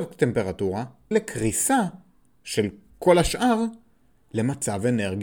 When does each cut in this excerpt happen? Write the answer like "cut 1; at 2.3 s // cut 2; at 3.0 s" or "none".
cut 1; at 1.1 s